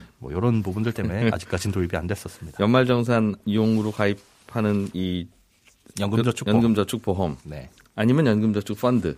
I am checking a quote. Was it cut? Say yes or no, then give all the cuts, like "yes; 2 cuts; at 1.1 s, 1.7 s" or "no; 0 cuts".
no; 0 cuts